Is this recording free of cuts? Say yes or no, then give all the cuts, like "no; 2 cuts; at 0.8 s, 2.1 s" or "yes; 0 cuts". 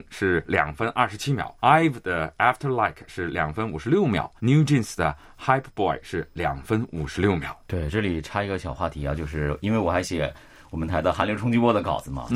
no; 2 cuts; at 1.6 s, 4.4 s